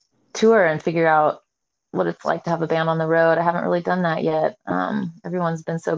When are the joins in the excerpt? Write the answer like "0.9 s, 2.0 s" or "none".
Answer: none